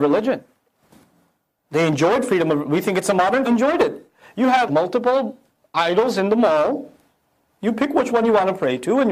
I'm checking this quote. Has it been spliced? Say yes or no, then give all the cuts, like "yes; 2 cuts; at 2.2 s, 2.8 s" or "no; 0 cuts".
yes; 2 cuts; at 3.4 s, 4.7 s